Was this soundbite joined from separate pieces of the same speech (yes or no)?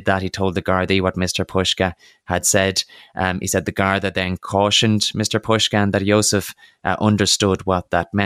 no